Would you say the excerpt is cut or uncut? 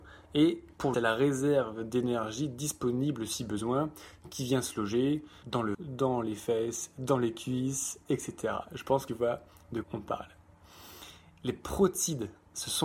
cut